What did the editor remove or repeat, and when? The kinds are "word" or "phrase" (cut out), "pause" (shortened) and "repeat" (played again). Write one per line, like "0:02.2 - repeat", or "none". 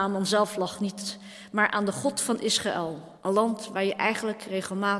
0:03.2 - pause

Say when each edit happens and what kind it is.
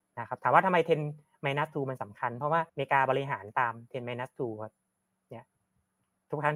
0:02.7 - pause

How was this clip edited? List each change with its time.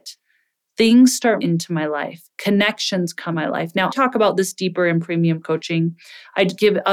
0:01.4 - phrase
0:02.3 - pause
0:03.3 - word
0:03.9 - word

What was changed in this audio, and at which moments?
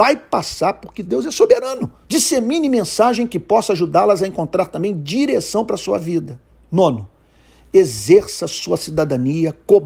0:02.0 - pause
0:06.5 - pause

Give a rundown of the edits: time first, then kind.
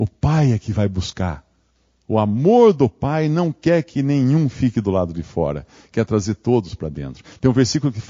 none

